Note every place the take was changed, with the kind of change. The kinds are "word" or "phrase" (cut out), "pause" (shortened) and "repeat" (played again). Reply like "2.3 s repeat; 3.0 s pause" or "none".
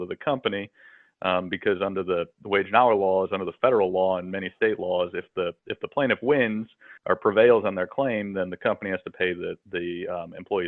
7.0 s pause